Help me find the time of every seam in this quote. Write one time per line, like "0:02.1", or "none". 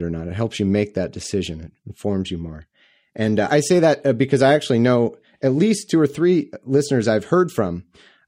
0:03.5